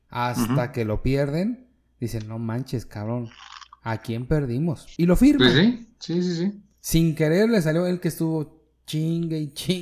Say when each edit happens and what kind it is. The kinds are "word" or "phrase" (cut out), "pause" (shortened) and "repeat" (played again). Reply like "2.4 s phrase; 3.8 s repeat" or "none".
none